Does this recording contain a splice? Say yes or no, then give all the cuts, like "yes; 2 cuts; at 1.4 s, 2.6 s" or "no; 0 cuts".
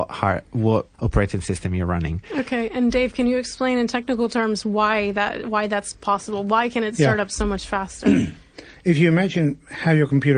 yes; 1 cut; at 0.9 s